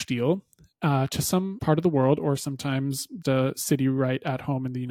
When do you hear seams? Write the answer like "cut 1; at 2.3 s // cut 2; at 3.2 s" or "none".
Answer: cut 1; at 1.6 s // cut 2; at 3.2 s